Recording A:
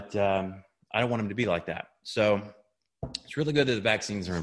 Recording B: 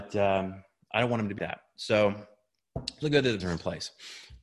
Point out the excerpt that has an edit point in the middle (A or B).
B